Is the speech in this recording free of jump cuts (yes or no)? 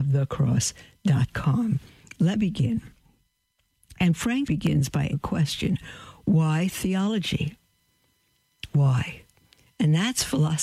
no